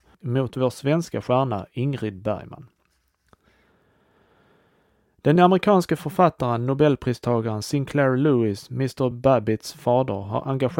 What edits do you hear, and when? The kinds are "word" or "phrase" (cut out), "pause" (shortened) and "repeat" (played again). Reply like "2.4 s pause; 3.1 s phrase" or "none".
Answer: none